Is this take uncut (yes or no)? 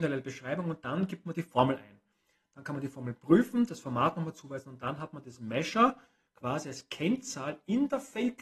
yes